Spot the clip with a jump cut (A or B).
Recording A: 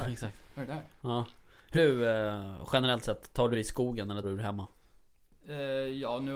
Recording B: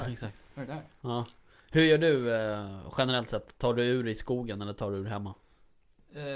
A